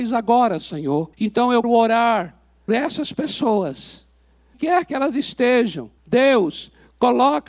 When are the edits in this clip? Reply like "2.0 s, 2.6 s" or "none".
1.1 s, 1.6 s, 2.7 s, 4.5 s, 6.0 s